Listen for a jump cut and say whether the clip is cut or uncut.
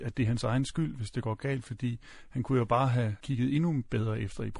cut